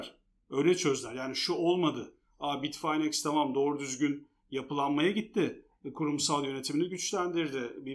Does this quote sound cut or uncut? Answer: uncut